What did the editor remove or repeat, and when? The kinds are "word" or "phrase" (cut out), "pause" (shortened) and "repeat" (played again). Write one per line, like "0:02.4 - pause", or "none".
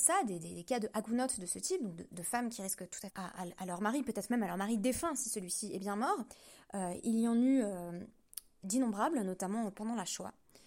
0:03.1 - phrase